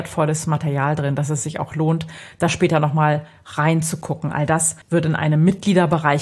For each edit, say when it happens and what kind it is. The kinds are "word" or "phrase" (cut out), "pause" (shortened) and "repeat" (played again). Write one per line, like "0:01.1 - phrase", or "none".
0:04.8 - pause